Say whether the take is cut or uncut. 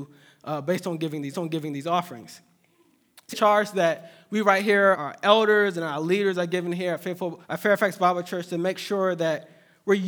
cut